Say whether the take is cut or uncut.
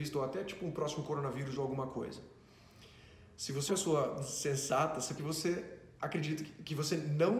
cut